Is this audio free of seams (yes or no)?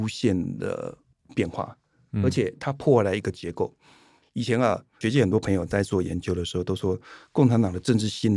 yes